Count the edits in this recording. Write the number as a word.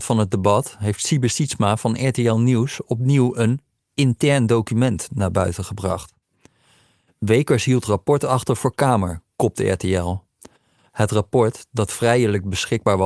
zero